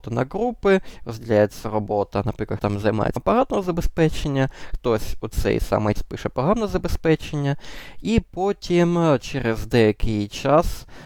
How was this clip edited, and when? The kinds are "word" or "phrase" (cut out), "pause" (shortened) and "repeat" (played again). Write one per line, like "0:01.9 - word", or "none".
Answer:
0:02.6 - word
0:03.2 - word
0:06.0 - word